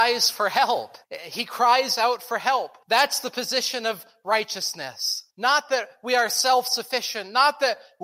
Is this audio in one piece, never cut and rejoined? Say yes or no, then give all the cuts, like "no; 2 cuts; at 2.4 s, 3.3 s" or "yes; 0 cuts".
no; 3 cuts; at 1.0 s, 2.8 s, 5.3 s